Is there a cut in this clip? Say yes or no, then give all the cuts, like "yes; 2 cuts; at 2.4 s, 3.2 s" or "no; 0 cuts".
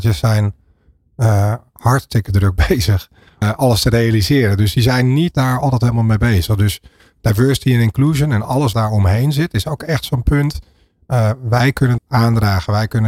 yes; 4 cuts; at 3.4 s, 5.3 s, 8.7 s, 12.0 s